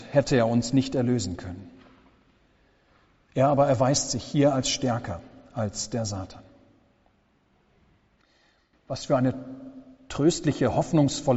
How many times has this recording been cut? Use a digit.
0